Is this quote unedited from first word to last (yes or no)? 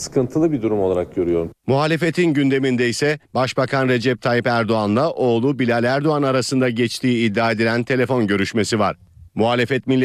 no